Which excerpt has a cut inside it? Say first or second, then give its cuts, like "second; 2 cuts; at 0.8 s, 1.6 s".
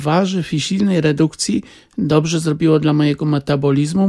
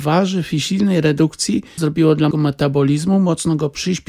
second; 2 cuts; at 1.8 s, 2.3 s